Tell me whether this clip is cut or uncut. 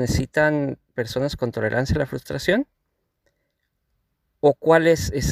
uncut